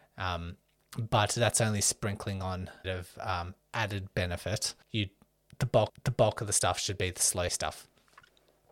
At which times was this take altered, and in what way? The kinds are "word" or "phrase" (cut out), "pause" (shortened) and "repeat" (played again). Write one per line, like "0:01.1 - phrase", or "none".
0:02.8 - phrase
0:04.8 - pause
0:05.9 - repeat
0:07.5 - word